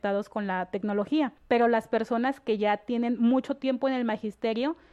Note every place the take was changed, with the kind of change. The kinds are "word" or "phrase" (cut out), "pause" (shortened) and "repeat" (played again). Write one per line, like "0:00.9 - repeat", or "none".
0:01.4 - pause